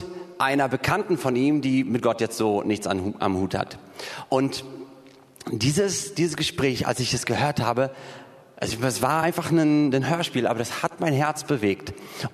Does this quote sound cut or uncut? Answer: uncut